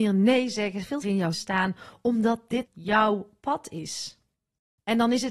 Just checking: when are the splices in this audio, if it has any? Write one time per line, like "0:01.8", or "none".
0:01.0
0:01.3
0:02.6